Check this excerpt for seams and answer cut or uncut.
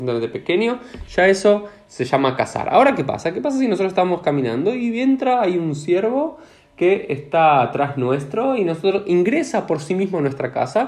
uncut